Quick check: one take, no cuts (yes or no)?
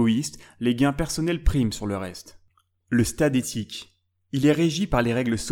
yes